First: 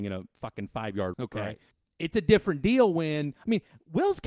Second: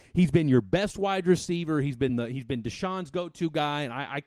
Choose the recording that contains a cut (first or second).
first